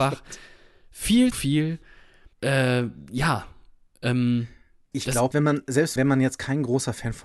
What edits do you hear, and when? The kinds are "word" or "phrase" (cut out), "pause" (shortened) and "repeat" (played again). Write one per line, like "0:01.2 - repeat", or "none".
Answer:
0:01.3 - word
0:02.3 - pause
0:04.9 - word
0:05.3 - phrase
0:06.0 - word

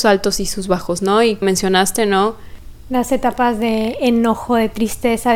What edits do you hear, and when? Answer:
0:01.4 - phrase

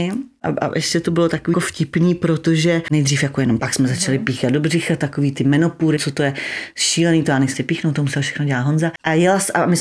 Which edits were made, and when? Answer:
0:01.5 - word
0:03.6 - word
0:06.0 - word
0:07.5 - word

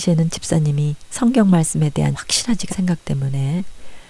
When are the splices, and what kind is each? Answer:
0:02.1 - word
0:02.7 - word

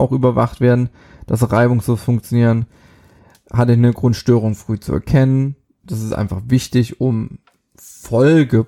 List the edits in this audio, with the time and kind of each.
none

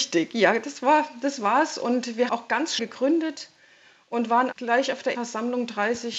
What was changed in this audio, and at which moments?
0:02.3 - word
0:02.8 - word
0:04.5 - word
0:05.1 - word

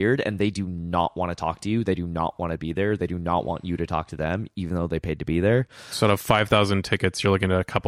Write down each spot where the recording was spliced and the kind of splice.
none

